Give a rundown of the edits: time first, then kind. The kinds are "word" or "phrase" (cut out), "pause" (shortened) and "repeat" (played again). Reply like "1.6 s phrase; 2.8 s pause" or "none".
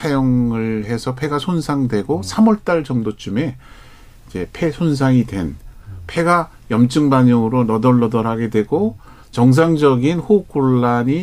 none

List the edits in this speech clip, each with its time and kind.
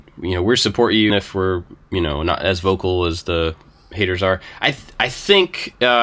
1.1 s word

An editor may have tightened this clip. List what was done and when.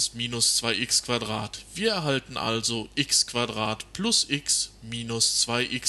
none

